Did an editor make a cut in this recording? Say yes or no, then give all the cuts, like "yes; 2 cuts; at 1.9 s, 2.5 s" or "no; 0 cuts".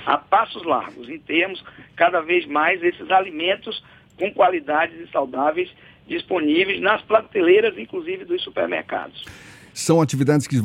no; 0 cuts